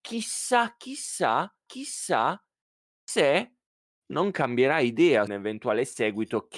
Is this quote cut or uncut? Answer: cut